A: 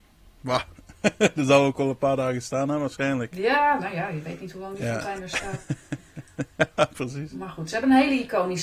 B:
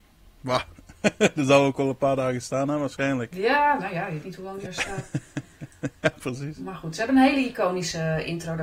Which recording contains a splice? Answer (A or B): B